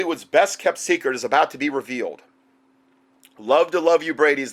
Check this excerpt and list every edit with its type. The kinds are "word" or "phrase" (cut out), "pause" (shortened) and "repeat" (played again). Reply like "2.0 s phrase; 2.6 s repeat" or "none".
none